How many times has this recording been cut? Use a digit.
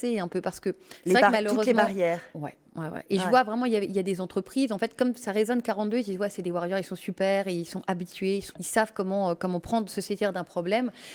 1